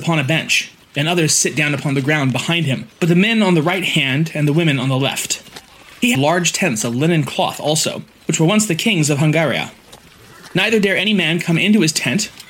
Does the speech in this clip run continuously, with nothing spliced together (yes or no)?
no